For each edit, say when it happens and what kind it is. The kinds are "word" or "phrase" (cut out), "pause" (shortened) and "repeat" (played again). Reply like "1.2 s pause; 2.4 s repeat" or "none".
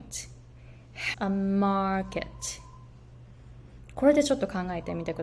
1.1 s word

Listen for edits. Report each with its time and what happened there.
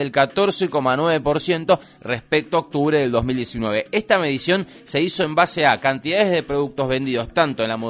none

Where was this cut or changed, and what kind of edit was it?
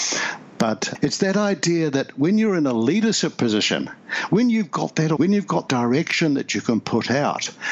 5.2 s word; 5.7 s word

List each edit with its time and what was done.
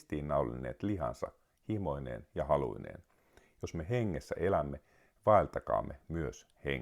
none

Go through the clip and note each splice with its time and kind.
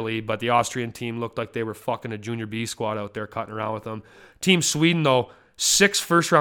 none

